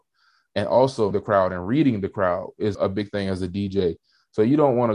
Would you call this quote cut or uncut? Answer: cut